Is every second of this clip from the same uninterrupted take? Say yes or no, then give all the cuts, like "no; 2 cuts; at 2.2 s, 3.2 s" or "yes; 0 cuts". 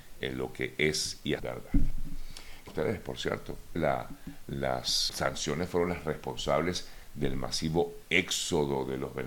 no; 4 cuts; at 1.4 s, 2.7 s, 3.8 s, 5.1 s